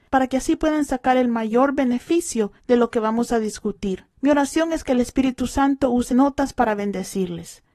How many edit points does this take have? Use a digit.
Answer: 3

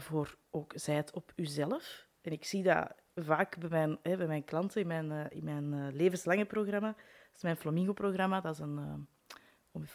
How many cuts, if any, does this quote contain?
0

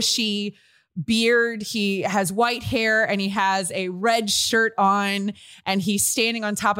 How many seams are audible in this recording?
0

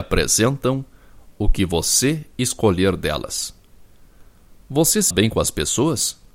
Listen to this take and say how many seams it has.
1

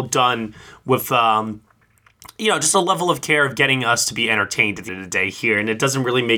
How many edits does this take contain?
1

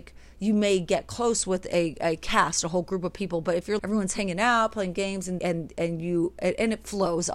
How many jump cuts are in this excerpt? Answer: 2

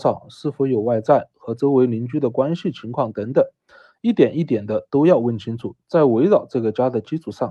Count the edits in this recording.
0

